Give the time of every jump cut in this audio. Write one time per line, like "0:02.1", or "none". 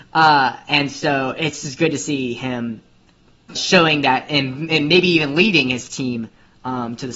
0:03.6